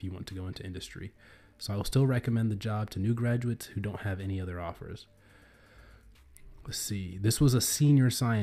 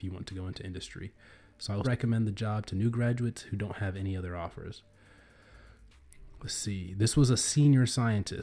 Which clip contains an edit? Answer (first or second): second